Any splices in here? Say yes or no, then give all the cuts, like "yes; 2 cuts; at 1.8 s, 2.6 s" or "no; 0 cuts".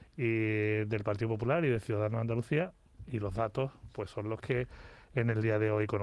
no; 0 cuts